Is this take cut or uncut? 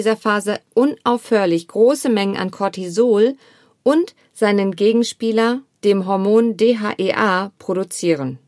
uncut